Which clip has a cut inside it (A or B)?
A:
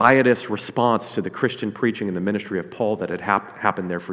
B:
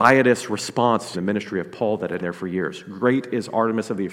B